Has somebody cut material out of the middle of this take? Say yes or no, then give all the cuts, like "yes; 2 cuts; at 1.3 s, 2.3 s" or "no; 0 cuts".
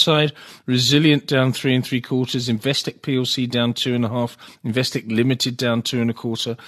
no; 0 cuts